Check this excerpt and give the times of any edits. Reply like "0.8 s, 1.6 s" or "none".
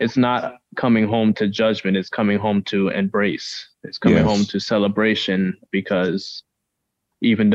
3.7 s